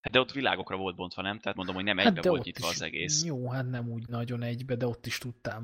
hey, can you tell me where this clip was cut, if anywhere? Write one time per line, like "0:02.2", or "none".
0:01.5